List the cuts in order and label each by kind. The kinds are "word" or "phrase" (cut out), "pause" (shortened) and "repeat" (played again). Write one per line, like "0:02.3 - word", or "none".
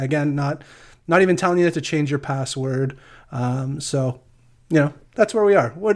none